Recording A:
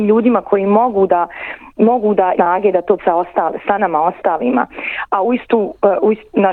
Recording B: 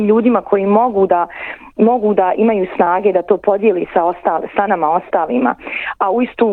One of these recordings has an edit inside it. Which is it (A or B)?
A